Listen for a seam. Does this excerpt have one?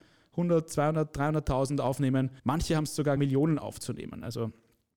yes; 2 cuts; at 2.4 s, 3.2 s

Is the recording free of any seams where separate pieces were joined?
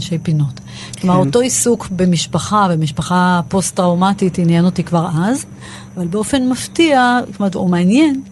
yes; 0 cuts

